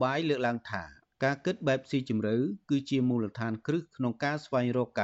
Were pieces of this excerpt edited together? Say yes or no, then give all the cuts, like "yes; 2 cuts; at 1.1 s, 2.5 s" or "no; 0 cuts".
no; 0 cuts